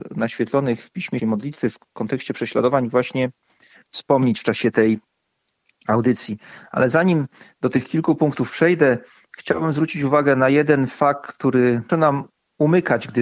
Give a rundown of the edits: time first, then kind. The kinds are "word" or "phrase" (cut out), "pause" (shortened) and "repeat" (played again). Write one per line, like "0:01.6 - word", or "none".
0:01.2 - phrase
0:11.9 - word